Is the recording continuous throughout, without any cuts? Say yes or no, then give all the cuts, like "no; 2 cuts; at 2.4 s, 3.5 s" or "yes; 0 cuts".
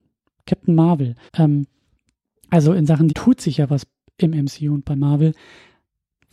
no; 2 cuts; at 1.3 s, 3.1 s